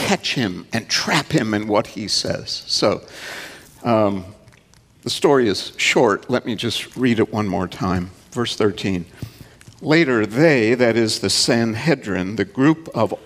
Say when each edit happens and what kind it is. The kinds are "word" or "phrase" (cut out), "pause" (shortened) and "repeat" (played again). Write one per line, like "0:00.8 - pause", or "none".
none